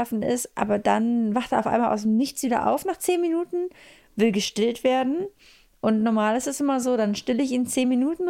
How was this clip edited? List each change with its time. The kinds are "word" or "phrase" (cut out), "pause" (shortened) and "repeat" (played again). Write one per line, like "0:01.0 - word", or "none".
none